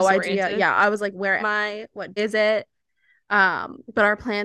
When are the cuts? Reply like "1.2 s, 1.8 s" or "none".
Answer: 1.4 s, 2.2 s